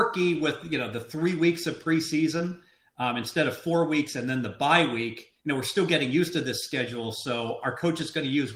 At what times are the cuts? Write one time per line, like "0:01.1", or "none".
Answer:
0:05.4